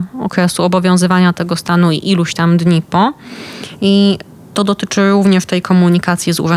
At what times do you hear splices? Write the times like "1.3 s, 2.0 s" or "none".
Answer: none

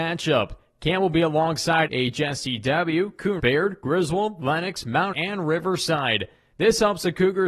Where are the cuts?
1.9 s, 3.4 s, 5.1 s

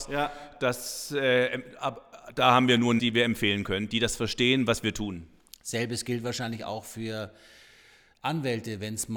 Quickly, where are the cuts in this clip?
3.0 s

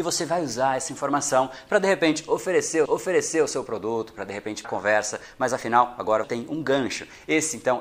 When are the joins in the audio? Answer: 2.8 s, 4.6 s, 6.2 s

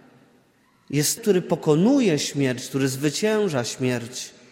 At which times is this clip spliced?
1.2 s

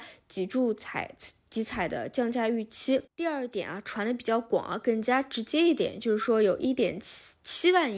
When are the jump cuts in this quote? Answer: 3.1 s

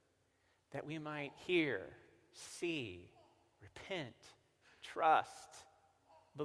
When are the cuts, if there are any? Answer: none

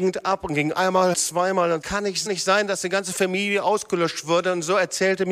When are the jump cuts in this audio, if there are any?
1.1 s, 1.8 s, 2.3 s

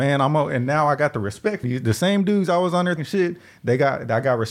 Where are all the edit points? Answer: 1.6 s, 3.0 s

